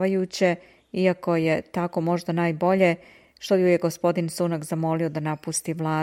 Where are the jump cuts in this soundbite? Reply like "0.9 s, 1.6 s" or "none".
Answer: none